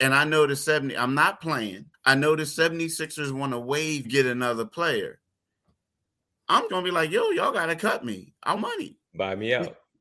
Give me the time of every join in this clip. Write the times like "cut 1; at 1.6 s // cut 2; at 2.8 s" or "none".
cut 1; at 1.9 s // cut 2; at 4.0 s // cut 3; at 6.7 s // cut 4; at 8.6 s